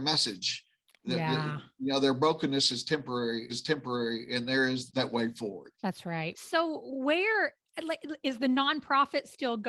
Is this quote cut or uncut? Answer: cut